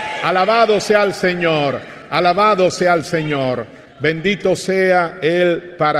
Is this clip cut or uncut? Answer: uncut